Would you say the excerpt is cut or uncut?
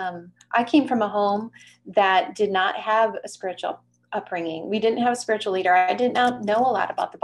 uncut